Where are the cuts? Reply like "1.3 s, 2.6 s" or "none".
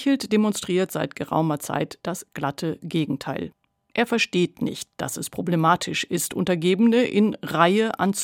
none